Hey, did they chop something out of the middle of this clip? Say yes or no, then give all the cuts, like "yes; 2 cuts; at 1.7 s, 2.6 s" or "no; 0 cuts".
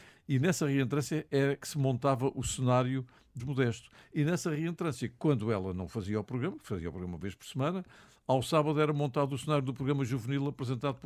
yes; 2 cuts; at 1.6 s, 3.4 s